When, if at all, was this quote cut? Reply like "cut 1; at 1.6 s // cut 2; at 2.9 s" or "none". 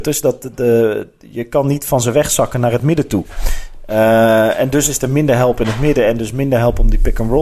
none